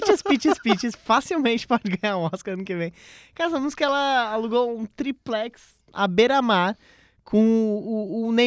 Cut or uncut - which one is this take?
uncut